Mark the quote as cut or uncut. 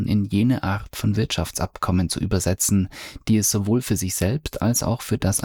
uncut